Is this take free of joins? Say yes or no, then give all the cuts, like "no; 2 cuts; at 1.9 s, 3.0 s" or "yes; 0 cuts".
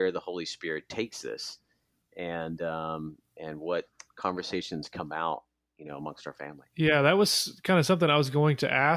yes; 0 cuts